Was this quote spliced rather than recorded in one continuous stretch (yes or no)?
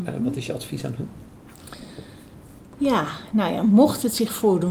yes